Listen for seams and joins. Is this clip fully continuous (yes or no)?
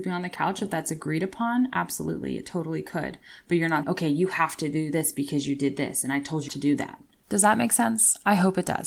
no